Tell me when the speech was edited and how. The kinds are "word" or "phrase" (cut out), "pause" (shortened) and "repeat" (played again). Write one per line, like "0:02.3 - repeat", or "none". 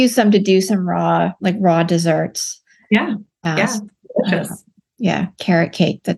none